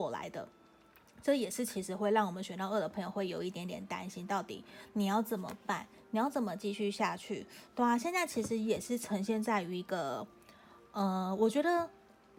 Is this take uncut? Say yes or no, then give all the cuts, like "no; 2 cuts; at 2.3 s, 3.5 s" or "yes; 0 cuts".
yes; 0 cuts